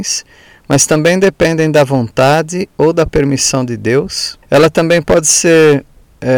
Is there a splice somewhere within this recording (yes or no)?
yes